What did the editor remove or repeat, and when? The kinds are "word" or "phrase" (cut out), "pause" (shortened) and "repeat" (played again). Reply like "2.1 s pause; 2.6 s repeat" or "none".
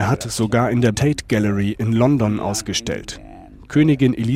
0.9 s word